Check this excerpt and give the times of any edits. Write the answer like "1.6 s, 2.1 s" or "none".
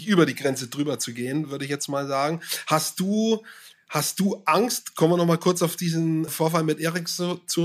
6.3 s